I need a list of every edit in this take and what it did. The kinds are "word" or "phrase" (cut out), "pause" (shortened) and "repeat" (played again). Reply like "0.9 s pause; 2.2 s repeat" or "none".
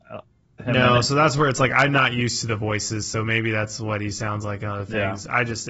none